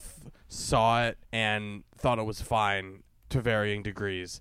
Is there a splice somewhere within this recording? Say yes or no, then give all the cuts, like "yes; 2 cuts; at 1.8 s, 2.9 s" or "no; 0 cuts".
yes; 2 cuts; at 1.2 s, 3.2 s